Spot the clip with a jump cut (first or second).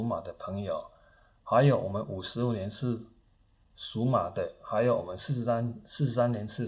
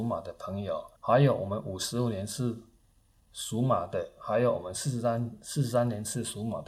second